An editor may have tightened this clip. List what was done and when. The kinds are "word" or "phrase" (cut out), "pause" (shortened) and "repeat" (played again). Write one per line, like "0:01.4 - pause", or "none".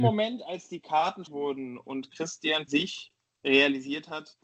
0:01.3 - word
0:02.7 - word